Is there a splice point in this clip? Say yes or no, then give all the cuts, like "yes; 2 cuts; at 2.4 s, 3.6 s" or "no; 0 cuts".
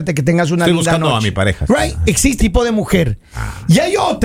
yes; 1 cut; at 2.4 s